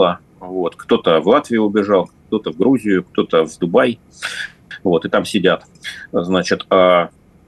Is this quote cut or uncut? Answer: uncut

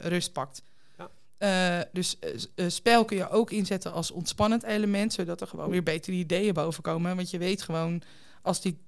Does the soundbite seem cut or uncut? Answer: uncut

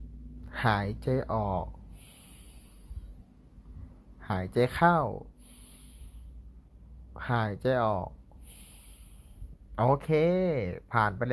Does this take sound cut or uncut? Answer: uncut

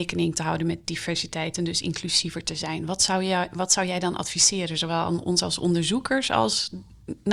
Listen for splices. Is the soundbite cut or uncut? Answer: uncut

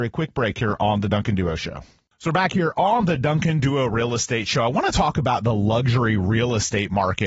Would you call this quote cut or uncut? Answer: uncut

